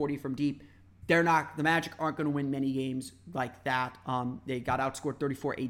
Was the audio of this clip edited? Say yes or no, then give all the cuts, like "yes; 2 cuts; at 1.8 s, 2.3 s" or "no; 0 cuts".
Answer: no; 0 cuts